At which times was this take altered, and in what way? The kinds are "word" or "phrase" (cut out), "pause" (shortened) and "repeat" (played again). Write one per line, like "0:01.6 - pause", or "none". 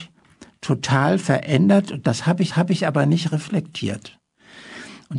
0:02.5 - repeat